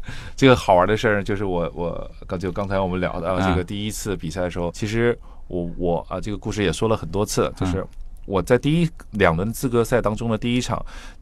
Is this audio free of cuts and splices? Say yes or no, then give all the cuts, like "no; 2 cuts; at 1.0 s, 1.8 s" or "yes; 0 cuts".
no; 1 cut; at 4.7 s